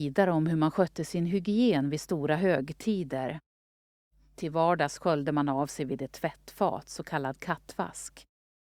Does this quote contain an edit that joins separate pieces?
no; 0 cuts

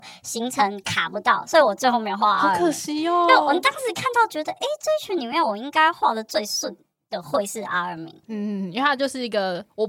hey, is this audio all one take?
yes; 0 cuts

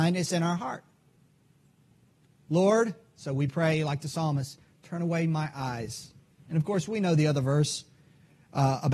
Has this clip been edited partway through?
no; 0 cuts

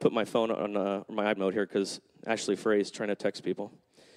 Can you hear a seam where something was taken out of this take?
yes; 1 cut; at 1.4 s

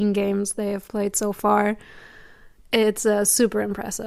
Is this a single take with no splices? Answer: yes; 0 cuts

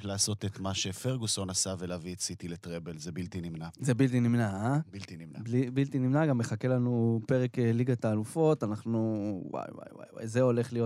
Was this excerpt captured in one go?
yes; 0 cuts

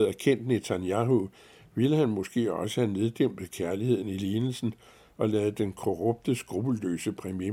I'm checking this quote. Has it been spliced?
no; 0 cuts

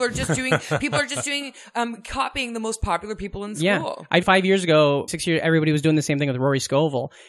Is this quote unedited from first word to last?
no; 2 cuts; at 4.2 s, 5.1 s

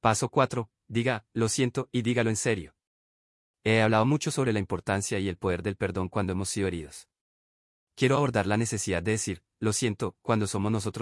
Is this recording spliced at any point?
no; 0 cuts

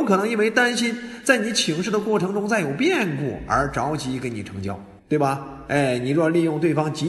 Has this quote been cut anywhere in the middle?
yes; 1 cut; at 5.0 s

